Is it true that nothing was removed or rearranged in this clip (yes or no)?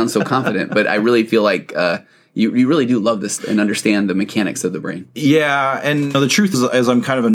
no